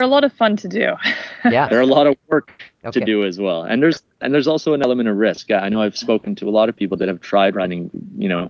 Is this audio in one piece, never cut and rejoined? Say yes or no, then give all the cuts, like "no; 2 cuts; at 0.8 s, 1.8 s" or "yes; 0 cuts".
yes; 0 cuts